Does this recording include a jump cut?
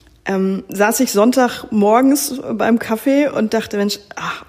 no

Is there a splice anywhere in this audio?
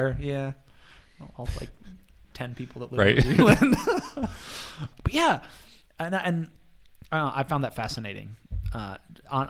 yes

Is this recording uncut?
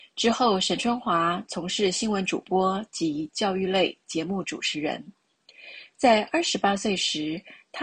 yes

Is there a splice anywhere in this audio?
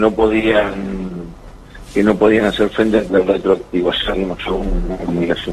yes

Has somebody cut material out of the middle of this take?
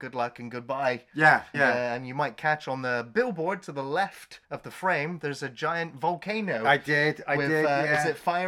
yes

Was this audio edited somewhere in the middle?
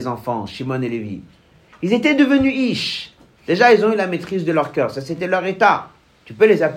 no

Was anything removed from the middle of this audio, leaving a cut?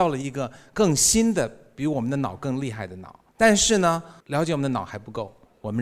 yes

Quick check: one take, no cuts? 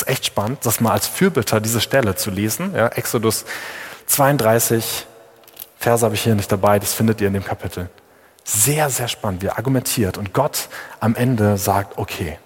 yes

